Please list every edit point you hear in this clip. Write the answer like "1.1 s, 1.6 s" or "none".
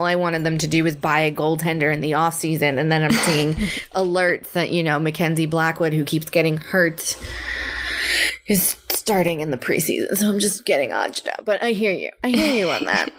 none